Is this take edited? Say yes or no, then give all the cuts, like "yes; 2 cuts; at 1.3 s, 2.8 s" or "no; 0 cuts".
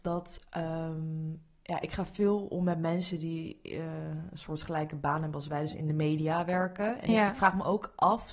no; 0 cuts